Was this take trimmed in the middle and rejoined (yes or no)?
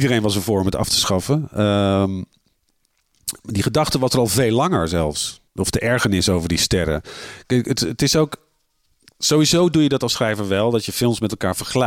yes